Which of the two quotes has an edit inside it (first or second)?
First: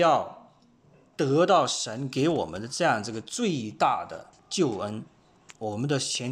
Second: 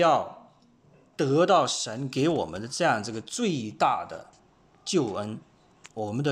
first